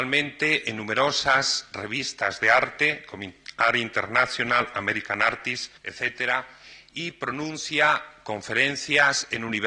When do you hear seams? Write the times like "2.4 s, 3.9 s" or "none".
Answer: 5.8 s